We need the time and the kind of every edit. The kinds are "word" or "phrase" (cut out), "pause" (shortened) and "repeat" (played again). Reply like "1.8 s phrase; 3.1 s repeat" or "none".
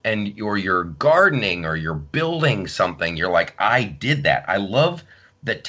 none